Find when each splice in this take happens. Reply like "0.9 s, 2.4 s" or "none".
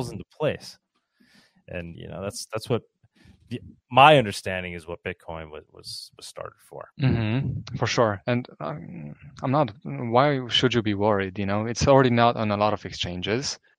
1.9 s, 6.9 s